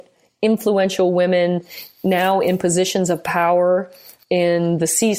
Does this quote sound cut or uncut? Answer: uncut